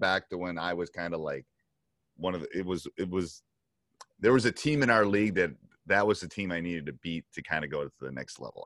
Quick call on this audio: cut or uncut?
uncut